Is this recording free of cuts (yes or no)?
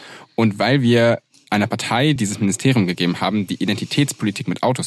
yes